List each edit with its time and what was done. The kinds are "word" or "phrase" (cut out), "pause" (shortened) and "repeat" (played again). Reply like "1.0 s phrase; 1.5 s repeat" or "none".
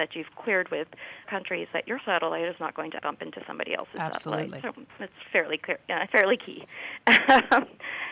1.2 s word; 3.0 s word; 6.1 s word